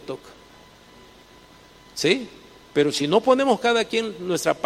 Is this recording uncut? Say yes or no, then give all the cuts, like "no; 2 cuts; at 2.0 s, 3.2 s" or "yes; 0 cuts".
yes; 0 cuts